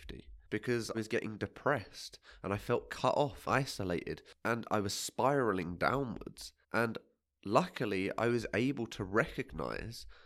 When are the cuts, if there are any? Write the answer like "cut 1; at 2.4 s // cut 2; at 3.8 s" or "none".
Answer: cut 1; at 0.9 s // cut 2; at 3.4 s // cut 3; at 6.6 s

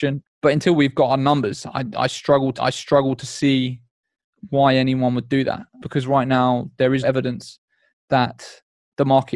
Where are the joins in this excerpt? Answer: cut 1; at 2.6 s // cut 2; at 7.0 s

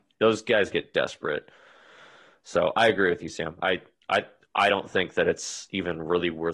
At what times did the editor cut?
none

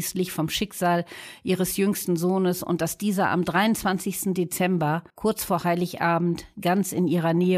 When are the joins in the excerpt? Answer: cut 1; at 5.1 s

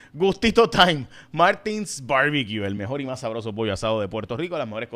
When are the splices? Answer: none

